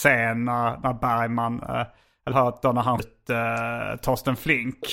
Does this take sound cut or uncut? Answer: cut